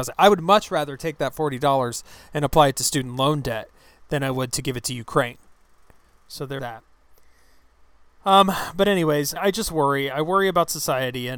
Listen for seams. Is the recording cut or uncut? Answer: cut